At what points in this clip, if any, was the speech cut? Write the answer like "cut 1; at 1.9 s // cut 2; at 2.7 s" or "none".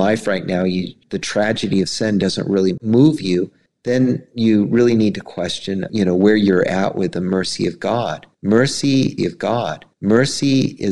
cut 1; at 9.2 s